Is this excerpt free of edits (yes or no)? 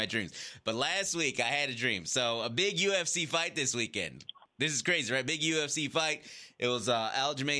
yes